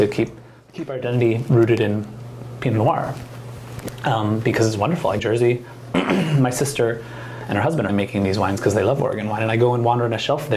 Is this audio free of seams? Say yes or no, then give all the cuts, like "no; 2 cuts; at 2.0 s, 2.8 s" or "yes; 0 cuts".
no; 2 cuts; at 5.2 s, 7.9 s